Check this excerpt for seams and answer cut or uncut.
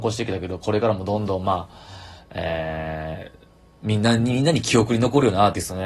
uncut